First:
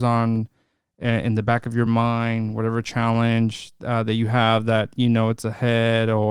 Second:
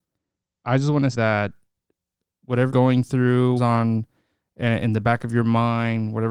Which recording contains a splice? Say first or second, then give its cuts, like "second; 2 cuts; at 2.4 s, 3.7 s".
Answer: second; 3 cuts; at 1.1 s, 2.7 s, 3.6 s